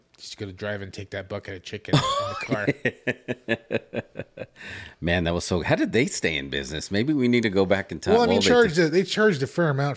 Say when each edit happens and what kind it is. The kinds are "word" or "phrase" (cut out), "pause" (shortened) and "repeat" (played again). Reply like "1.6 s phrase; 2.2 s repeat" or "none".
8.4 s word